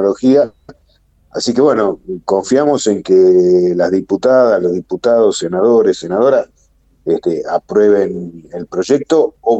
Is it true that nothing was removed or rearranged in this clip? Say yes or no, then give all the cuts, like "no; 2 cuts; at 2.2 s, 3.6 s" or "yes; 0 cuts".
yes; 0 cuts